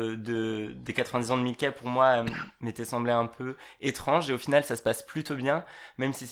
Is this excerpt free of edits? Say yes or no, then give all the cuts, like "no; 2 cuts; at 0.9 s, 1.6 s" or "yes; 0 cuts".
yes; 0 cuts